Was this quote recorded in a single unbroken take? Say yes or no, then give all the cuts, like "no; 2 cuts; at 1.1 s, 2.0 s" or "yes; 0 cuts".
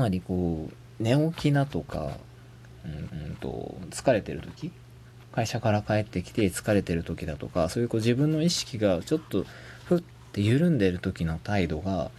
no; 1 cut; at 3.1 s